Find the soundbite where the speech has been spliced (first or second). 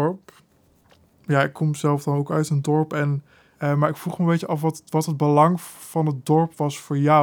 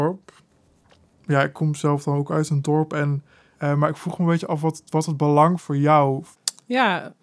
second